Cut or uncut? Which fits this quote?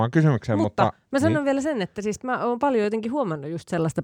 uncut